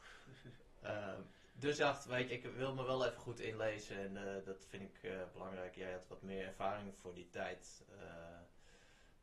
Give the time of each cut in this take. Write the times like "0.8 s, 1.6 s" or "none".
1.8 s, 2.3 s